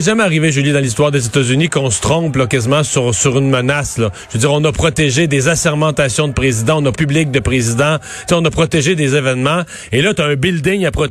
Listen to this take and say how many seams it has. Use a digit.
1